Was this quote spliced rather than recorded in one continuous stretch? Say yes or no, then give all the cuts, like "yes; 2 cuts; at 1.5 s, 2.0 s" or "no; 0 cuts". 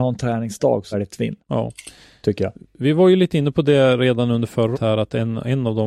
yes; 3 cuts; at 0.9 s, 1.4 s, 4.7 s